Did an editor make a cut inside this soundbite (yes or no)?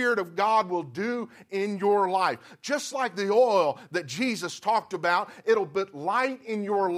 no